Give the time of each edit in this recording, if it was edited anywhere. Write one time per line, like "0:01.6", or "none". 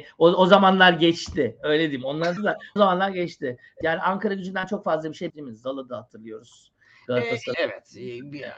0:02.4
0:02.8
0:03.8
0:05.3
0:07.5